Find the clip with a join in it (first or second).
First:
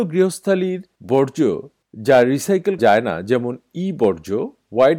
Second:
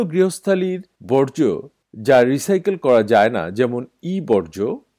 first